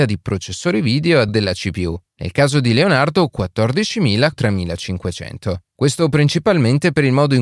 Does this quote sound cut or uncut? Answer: cut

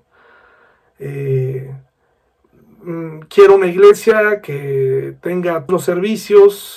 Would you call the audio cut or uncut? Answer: cut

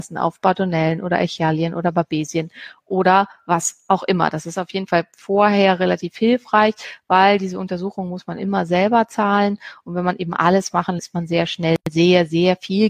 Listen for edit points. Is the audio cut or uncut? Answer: cut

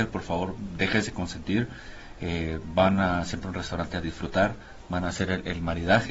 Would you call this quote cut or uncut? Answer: uncut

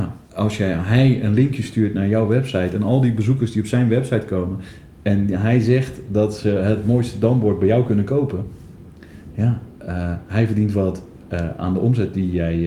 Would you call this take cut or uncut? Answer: uncut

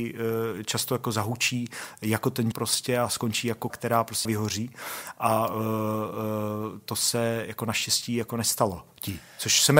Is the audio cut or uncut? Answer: cut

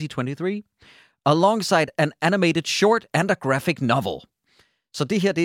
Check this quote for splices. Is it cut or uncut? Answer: uncut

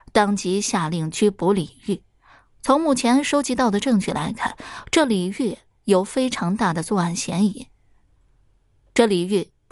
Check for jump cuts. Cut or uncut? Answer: uncut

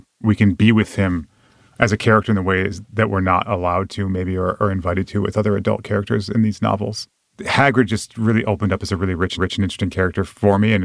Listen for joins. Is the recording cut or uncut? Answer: cut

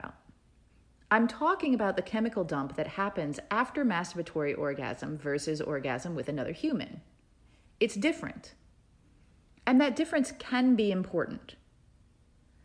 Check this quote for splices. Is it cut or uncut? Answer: uncut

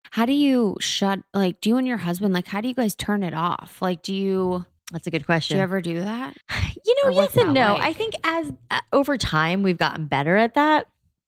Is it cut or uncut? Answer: cut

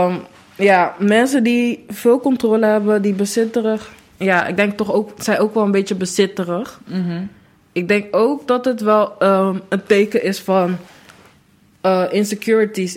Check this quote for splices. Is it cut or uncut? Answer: uncut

